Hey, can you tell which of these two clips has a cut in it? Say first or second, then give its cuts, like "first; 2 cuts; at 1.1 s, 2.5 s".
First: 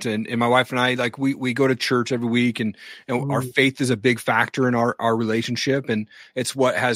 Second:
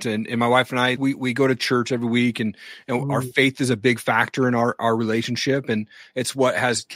second; 1 cut; at 1.0 s